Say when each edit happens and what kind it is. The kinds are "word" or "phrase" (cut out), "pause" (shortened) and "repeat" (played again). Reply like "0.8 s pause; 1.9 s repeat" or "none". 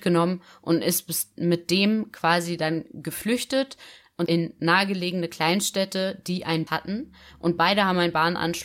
4.3 s word; 6.7 s word